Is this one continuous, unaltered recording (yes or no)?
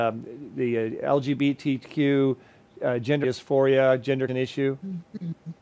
no